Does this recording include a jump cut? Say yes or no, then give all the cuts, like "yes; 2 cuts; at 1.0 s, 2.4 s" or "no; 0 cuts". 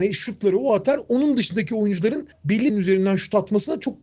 yes; 1 cut; at 2.7 s